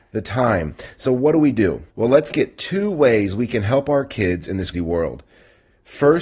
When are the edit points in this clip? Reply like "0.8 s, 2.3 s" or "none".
1.9 s, 2.3 s, 4.7 s